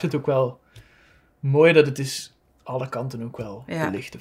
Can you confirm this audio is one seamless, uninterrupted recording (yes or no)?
yes